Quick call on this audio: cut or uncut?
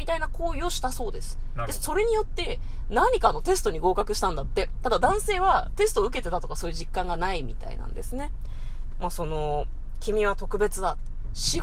cut